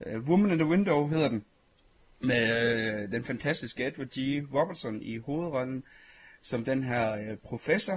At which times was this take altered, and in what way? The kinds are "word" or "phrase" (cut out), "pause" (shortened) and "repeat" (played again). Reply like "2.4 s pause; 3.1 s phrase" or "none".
none